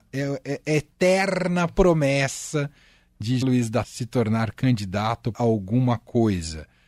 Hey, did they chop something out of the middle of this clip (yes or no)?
yes